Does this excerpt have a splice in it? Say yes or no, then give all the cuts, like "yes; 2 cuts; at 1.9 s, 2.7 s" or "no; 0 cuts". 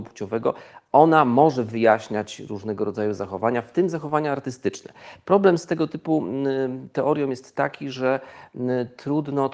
no; 0 cuts